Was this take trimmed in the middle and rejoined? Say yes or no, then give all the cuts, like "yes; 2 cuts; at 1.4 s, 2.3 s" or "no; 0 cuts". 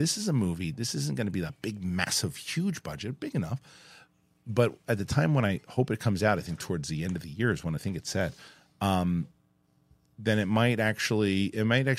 yes; 1 cut; at 7.8 s